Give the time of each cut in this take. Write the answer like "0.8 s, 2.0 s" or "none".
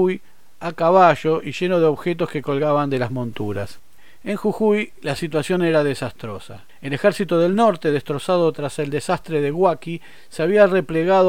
none